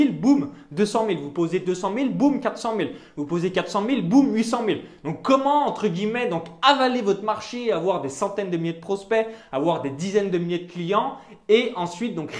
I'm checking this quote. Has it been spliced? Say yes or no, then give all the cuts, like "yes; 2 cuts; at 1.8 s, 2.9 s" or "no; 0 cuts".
no; 0 cuts